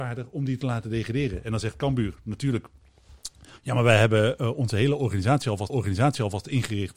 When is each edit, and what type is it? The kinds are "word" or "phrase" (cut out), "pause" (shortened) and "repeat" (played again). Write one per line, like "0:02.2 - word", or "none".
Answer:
0:05.7 - repeat